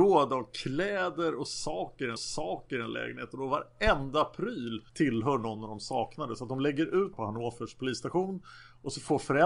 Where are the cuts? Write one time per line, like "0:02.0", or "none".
0:02.2
0:04.9
0:07.1